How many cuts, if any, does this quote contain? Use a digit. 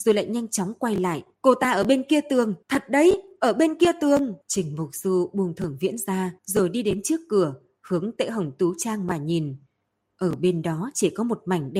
4